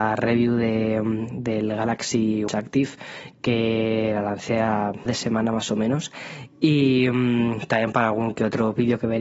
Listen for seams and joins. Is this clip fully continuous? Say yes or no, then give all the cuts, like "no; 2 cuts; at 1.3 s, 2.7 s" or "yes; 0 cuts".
no; 2 cuts; at 2.5 s, 5.1 s